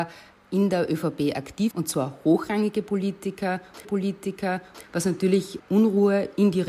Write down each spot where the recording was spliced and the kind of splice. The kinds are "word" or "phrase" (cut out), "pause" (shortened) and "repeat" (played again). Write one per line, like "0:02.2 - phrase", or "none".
0:01.7 - word
0:03.8 - repeat